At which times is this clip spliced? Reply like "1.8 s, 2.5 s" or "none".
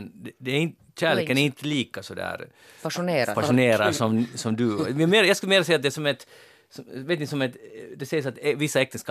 none